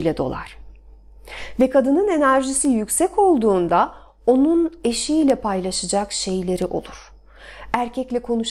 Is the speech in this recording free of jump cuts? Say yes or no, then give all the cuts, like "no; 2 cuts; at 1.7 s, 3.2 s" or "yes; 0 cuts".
yes; 0 cuts